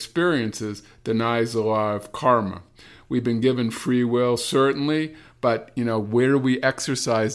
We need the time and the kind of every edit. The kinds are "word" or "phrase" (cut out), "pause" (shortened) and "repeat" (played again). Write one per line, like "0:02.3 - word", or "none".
none